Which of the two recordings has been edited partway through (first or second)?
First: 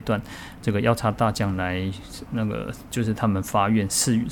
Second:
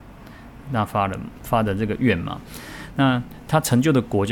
first